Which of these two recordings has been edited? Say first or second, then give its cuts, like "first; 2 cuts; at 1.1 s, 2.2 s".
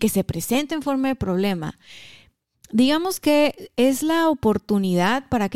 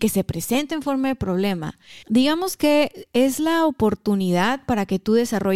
second; 1 cut; at 2.0 s